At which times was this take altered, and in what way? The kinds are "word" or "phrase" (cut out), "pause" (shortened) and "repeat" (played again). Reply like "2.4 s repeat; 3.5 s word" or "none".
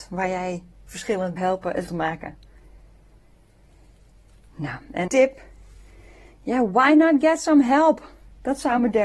1.4 s phrase; 1.9 s word; 5.1 s phrase